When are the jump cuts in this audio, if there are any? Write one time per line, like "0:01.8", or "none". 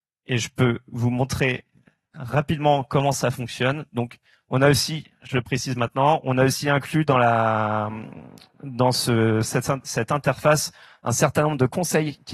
none